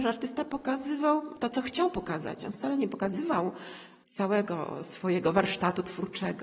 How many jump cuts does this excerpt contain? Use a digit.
0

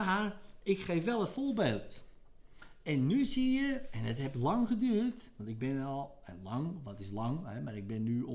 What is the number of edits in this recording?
0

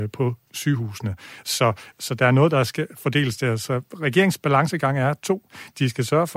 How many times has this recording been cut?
0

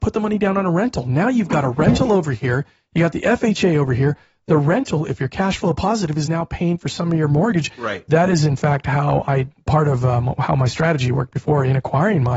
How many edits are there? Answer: 0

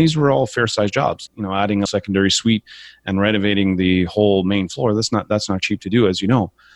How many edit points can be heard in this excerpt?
2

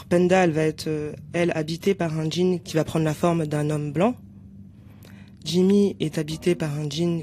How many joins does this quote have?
0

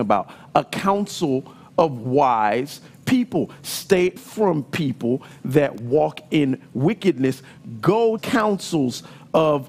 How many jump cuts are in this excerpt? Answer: 2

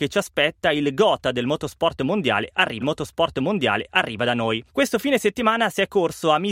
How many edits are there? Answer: 2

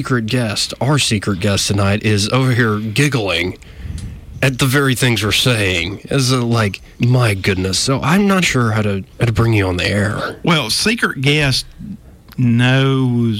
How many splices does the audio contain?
3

